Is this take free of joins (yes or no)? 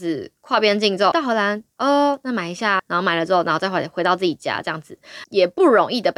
no